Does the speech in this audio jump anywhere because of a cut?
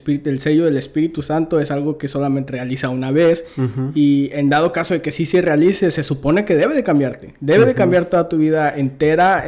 yes; 1 cut; at 2.5 s

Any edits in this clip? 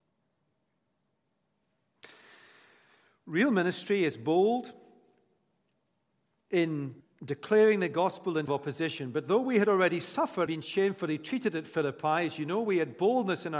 yes; 3 cuts; at 7.0 s, 8.5 s, 10.5 s

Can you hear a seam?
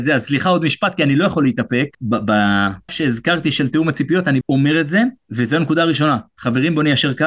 yes; 2 cuts; at 2.9 s, 4.4 s

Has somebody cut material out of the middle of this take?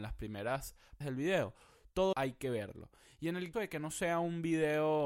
yes; 3 cuts; at 1.0 s, 2.1 s, 3.5 s

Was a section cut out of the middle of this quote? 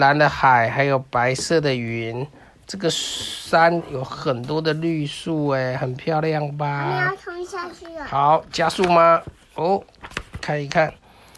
no; 0 cuts

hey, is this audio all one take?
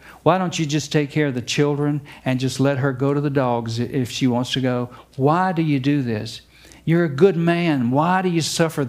yes; 0 cuts

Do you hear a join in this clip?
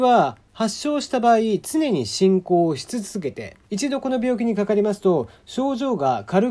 yes; 1 cut; at 3.6 s

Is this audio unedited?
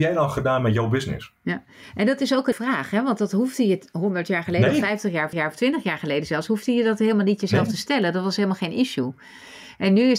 no; 3 cuts; at 1.4 s, 2.5 s, 5.3 s

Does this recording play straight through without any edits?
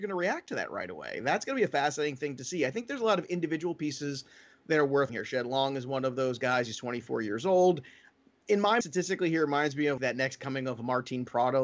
no; 3 cuts; at 5.1 s, 8.8 s, 10.0 s

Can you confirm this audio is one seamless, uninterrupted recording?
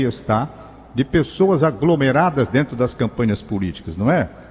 yes; 0 cuts

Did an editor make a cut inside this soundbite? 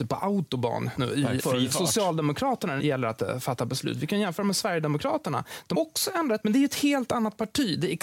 yes; 5 cuts; at 1.0 s, 1.4 s, 2.8 s, 5.7 s, 6.4 s

